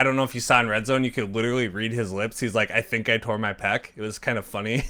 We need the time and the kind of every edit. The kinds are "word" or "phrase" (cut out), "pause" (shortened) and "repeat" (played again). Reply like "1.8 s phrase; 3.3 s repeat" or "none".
none